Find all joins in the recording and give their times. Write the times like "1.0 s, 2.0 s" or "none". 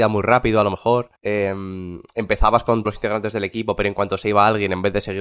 1.2 s, 2.8 s